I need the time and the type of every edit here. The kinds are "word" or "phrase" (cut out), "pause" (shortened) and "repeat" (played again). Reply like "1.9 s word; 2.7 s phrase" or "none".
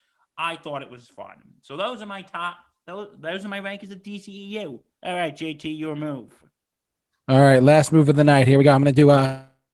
none